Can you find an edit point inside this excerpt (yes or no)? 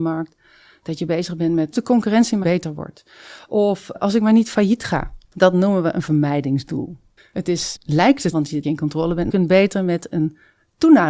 yes